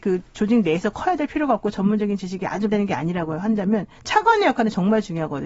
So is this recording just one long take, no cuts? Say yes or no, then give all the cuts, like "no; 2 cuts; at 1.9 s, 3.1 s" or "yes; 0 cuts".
no; 1 cut; at 2.7 s